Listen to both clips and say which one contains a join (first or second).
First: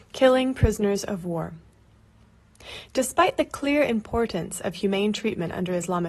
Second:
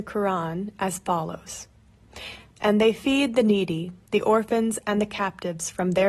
second